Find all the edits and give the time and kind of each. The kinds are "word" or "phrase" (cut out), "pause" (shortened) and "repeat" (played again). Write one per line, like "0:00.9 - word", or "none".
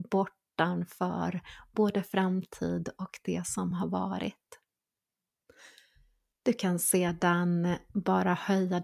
none